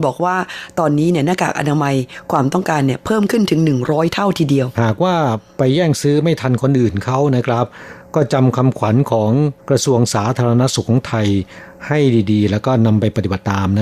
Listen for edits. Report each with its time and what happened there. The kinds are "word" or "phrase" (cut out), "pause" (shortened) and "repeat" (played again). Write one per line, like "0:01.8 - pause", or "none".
0:04.7 - phrase
0:09.6 - pause